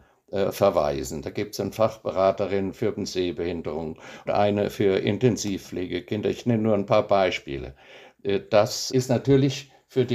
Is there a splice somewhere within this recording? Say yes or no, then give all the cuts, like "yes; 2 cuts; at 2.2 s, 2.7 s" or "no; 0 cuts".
yes; 3 cuts; at 2.9 s, 4.3 s, 8.9 s